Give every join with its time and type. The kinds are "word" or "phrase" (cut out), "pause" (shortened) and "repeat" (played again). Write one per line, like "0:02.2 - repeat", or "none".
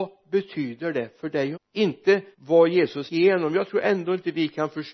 0:01.5 - phrase
0:02.3 - pause
0:03.1 - word